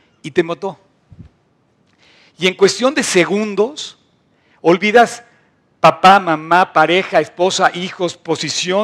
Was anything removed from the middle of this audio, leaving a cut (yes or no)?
no